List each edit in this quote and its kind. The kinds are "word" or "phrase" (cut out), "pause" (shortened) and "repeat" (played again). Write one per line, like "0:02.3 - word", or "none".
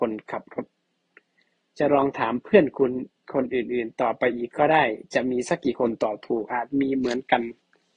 0:03.2 - pause